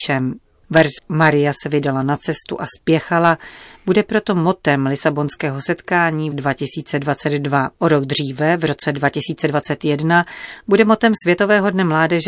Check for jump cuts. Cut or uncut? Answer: cut